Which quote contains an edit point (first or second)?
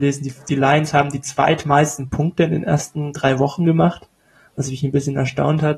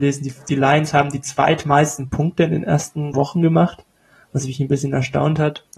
second